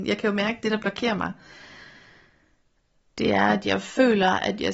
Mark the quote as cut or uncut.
uncut